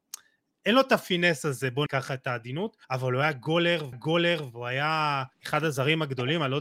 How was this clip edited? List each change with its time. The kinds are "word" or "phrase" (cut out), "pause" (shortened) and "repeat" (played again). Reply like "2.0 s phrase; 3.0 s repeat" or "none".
1.9 s word; 2.8 s pause; 3.9 s repeat; 5.3 s pause